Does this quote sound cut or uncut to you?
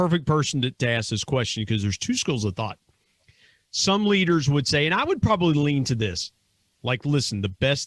uncut